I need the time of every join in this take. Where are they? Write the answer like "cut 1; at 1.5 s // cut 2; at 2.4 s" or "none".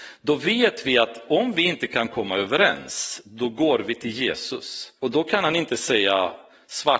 cut 1; at 5.0 s